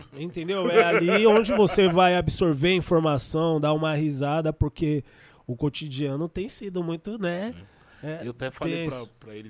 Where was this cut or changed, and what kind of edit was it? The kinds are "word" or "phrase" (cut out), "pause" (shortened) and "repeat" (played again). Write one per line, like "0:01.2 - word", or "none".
none